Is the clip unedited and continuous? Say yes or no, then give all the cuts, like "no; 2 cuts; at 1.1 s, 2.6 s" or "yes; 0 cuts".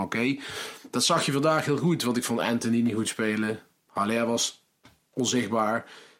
yes; 0 cuts